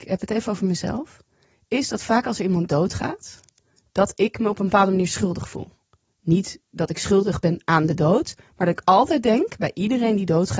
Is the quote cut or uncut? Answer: uncut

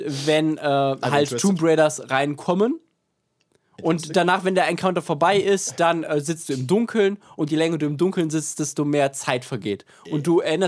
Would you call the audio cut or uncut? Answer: uncut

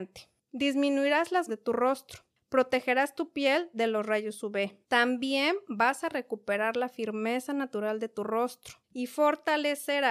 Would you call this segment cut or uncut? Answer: cut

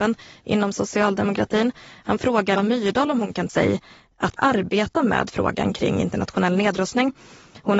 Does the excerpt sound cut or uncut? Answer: cut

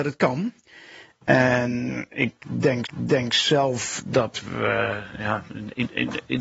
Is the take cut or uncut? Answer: cut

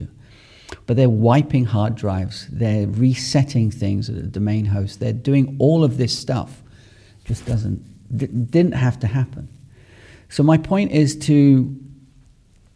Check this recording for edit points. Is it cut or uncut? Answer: uncut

